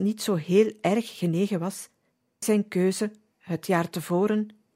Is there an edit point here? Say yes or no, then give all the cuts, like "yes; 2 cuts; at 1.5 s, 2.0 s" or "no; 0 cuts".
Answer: yes; 1 cut; at 2.4 s